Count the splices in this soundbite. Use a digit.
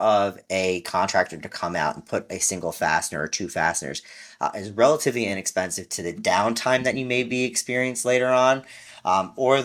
0